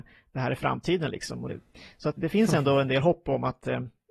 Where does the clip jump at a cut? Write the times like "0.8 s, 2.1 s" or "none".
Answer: 1.5 s, 2.2 s